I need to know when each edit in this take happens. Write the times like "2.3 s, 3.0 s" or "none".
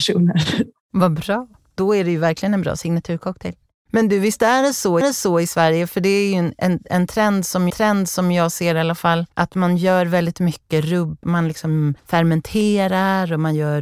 3.6 s, 5.0 s, 7.7 s, 9.3 s, 11.2 s, 12.0 s